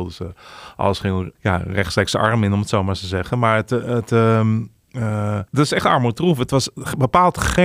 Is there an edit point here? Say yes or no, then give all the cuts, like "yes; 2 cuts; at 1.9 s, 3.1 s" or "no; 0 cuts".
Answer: yes; 2 cuts; at 1.4 s, 5.5 s